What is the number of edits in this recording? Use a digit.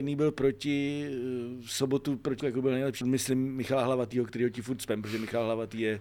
2